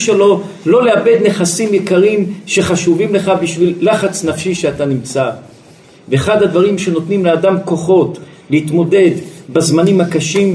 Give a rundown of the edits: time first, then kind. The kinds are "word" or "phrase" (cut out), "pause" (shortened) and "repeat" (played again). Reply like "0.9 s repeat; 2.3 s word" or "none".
none